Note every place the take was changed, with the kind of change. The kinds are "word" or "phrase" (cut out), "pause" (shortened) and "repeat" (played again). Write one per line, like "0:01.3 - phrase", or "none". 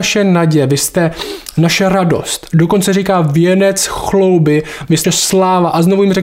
0:05.0 - word